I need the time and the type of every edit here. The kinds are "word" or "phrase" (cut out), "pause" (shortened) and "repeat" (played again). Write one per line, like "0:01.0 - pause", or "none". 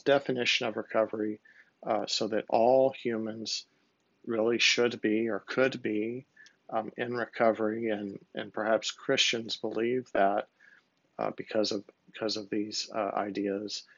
none